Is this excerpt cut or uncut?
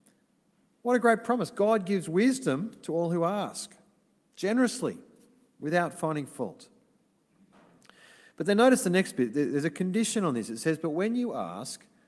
uncut